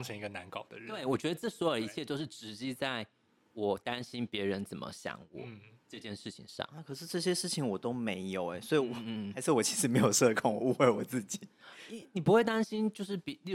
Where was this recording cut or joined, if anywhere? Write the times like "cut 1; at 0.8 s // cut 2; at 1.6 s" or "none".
none